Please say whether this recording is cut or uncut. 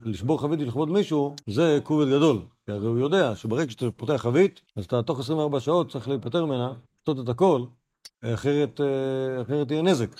cut